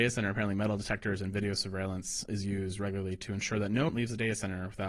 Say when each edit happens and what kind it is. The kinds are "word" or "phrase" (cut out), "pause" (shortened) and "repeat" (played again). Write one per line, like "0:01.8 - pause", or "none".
0:02.3 - word
0:03.9 - word